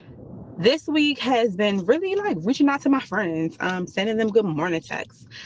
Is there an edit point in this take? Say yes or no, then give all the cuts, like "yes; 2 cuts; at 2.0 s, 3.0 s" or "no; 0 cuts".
no; 0 cuts